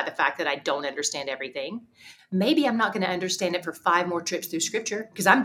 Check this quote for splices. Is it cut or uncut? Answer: uncut